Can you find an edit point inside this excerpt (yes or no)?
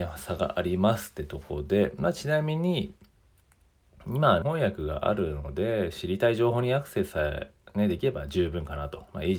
yes